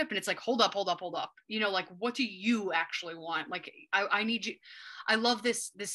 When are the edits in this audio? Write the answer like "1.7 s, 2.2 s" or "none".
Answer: none